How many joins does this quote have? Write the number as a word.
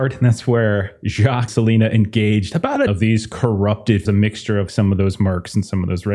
four